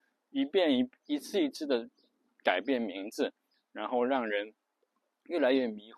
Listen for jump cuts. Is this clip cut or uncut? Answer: uncut